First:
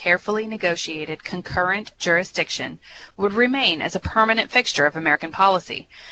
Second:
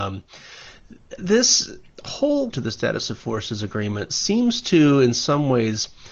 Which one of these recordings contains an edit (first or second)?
second